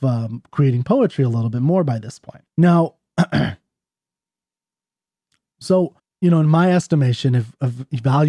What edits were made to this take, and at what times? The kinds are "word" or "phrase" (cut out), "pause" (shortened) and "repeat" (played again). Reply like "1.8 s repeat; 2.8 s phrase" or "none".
2.5 s pause; 6.0 s pause